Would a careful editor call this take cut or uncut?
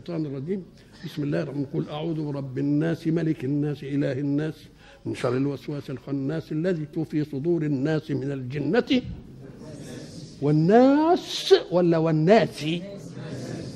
cut